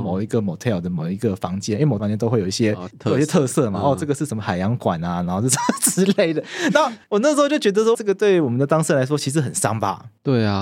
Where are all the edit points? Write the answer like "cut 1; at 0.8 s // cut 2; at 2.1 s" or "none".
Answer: cut 1; at 2.0 s // cut 2; at 2.9 s // cut 3; at 7.0 s // cut 4; at 7.9 s